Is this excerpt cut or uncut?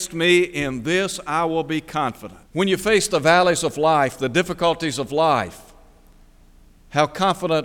cut